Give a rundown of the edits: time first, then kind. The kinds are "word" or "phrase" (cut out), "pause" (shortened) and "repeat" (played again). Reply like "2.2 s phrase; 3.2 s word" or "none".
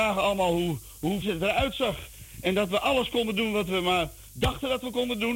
1.2 s word

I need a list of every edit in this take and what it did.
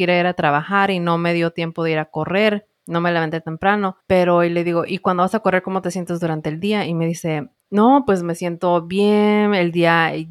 4.0 s pause; 7.6 s pause

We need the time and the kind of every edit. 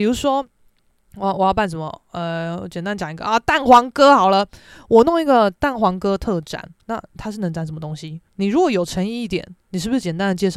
6.8 s pause; 8.3 s pause

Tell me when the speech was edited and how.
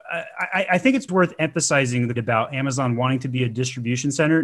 1.1 s word; 2.2 s phrase

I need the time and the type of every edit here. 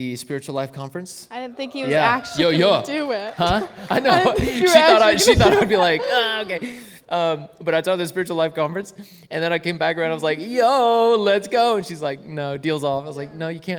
7.0 s pause

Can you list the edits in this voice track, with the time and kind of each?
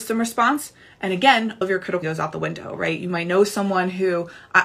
1.6 s word; 2.0 s word

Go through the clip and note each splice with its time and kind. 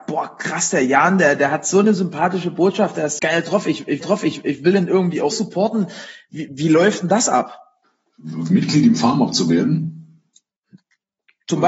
3.2 s word; 4.0 s repeat; 5.3 s word; 7.8 s pause

